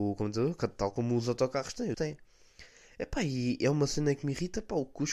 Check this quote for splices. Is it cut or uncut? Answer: cut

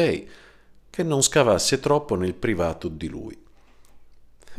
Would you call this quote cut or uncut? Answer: uncut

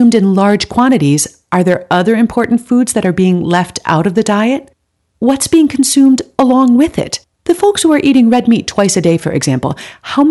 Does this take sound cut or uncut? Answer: cut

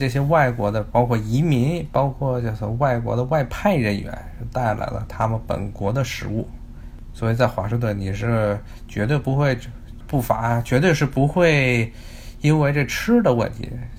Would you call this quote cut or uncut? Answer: cut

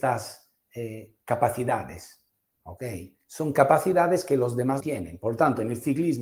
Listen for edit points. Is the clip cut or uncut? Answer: cut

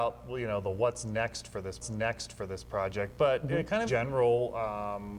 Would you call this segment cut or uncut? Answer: cut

